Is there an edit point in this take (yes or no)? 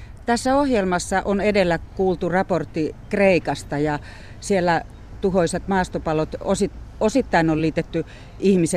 no